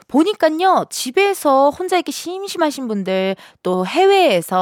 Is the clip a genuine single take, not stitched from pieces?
yes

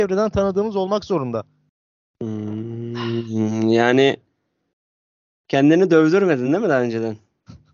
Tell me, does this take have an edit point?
no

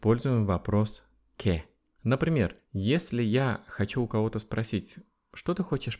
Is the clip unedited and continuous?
yes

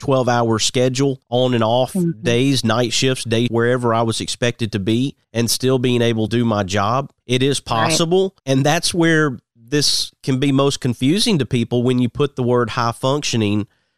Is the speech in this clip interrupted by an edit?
yes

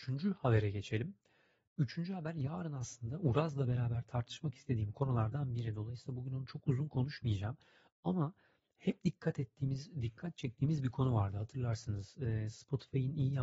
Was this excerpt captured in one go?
yes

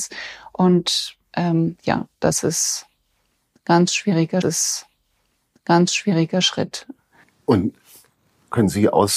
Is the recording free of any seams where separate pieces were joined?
no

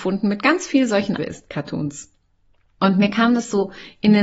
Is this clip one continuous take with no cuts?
no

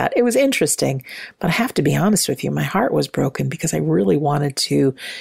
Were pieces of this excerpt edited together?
no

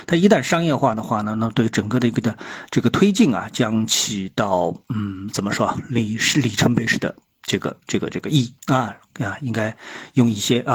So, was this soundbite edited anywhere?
yes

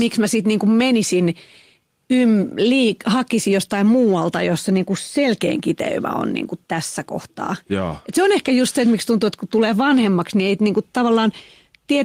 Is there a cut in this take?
no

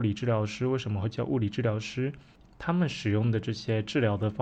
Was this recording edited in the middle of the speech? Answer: no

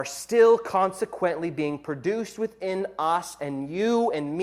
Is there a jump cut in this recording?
no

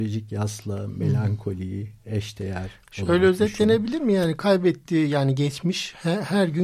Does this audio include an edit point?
no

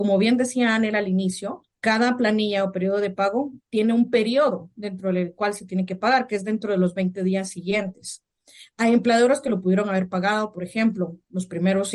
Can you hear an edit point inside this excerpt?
yes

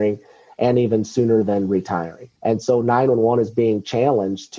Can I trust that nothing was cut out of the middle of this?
no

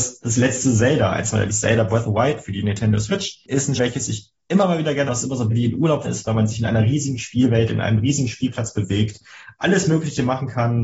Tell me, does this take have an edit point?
yes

